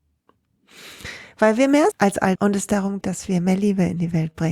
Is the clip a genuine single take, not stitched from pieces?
no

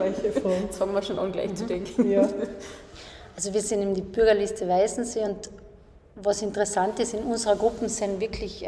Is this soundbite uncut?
yes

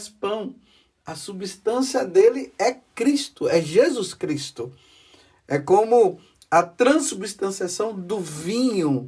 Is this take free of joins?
yes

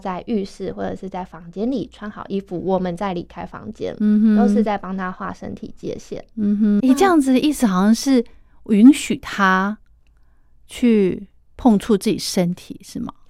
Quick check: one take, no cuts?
no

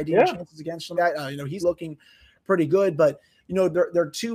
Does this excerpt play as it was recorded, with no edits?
no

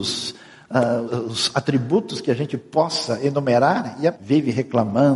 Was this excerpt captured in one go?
no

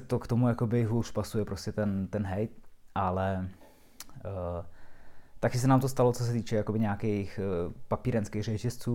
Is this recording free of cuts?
yes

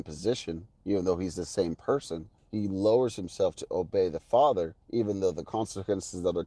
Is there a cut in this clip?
yes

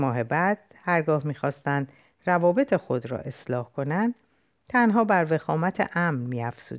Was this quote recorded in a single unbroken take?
yes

